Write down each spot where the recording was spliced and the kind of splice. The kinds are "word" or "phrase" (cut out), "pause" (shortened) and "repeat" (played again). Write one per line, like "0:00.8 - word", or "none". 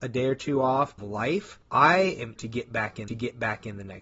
0:01.0 - phrase
0:01.6 - pause
0:02.4 - word
0:03.1 - repeat